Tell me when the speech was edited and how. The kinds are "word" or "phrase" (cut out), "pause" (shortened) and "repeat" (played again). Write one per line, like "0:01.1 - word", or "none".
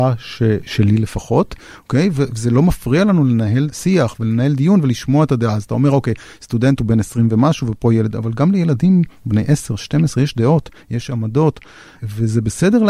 none